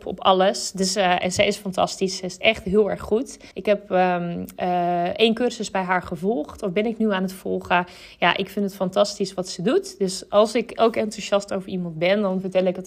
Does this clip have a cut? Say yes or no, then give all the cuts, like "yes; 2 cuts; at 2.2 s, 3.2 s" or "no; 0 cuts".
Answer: yes; 1 cut; at 3.5 s